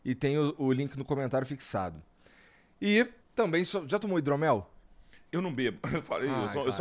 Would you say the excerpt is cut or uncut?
cut